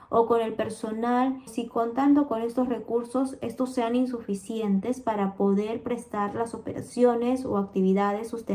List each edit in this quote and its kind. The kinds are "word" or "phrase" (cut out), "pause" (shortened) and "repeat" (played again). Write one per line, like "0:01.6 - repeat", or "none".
0:01.5 - word